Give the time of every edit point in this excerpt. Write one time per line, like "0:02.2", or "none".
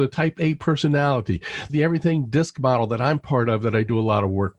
0:01.7